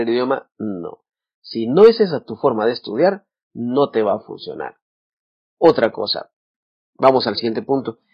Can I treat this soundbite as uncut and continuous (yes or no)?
yes